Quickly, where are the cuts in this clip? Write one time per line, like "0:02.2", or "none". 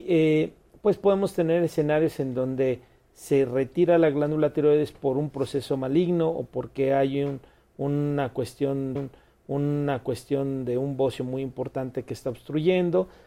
0:09.0